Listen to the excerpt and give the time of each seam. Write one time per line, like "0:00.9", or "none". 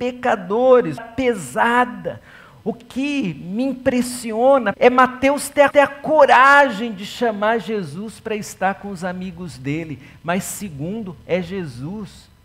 0:01.0
0:04.7
0:05.7